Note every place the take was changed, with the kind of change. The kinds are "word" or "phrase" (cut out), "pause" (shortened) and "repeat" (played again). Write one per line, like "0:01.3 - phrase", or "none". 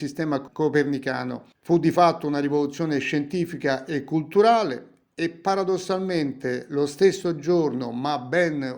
none

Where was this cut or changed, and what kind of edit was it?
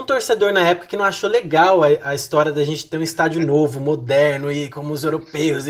none

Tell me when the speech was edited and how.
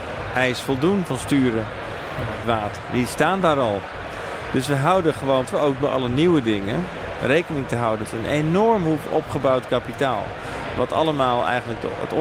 0:02.4 - word
0:05.4 - word
0:05.8 - word
0:08.0 - word

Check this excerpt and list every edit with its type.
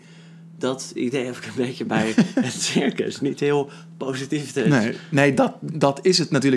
none

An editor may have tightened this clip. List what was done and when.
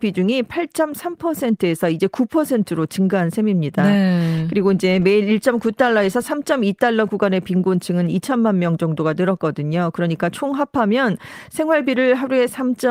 none

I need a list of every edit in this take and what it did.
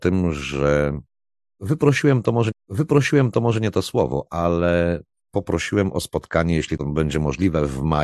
0:02.5 - repeat

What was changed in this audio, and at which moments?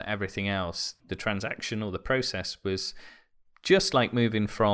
none

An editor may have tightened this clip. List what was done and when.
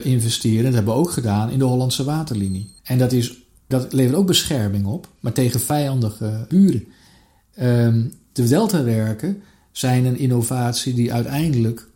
0:02.8 - pause
0:03.7 - word

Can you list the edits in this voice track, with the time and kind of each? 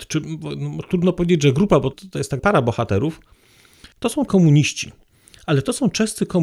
0:01.9 - word
0:02.4 - word
0:03.9 - pause
0:04.3 - word

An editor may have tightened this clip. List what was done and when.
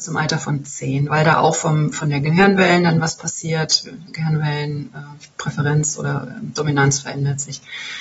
0:05.3 - pause

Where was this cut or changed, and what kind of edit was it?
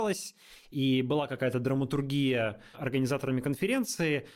0:02.7 - word

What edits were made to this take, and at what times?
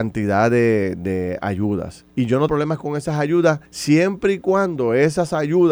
0:02.1 - pause
0:02.5 - word
0:03.7 - pause

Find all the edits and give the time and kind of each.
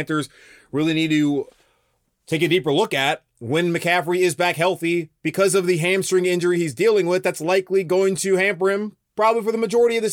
none

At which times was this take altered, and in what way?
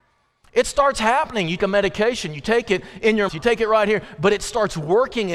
0:01.6 - word
0:03.3 - word

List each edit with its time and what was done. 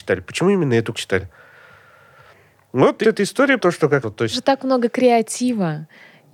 0:00.9 - word
0:03.0 - word
0:03.6 - word
0:04.0 - word
0:04.3 - word

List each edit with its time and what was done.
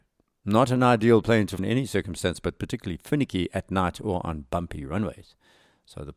0:01.6 - word

